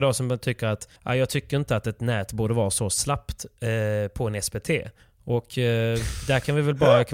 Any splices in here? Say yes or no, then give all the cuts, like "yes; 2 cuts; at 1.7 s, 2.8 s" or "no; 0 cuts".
yes; 2 cuts; at 1.0 s, 5.0 s